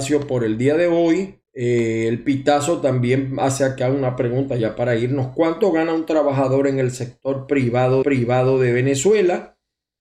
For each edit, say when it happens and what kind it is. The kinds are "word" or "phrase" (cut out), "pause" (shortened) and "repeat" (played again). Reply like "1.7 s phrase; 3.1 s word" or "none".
1.4 s pause; 8.0 s repeat